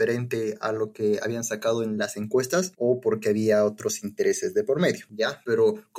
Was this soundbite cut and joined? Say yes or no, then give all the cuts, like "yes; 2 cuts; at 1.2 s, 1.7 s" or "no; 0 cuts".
no; 0 cuts